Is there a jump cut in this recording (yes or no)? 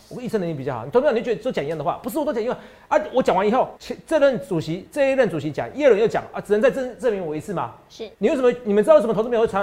yes